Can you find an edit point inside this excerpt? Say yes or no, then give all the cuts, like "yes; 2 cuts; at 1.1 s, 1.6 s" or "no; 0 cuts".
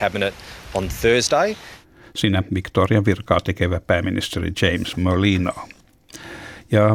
no; 0 cuts